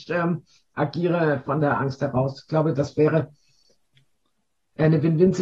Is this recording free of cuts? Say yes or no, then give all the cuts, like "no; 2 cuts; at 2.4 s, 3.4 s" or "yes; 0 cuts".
yes; 0 cuts